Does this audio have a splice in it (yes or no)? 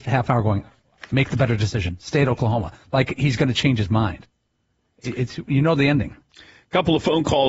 no